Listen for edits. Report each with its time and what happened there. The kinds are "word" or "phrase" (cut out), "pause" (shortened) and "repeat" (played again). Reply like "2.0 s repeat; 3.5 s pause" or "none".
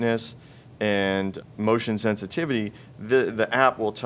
1.4 s word